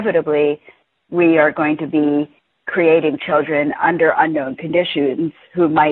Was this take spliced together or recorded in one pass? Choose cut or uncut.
uncut